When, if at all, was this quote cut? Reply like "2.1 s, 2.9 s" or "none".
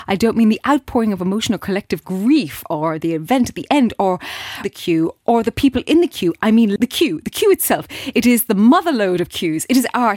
4.6 s, 6.8 s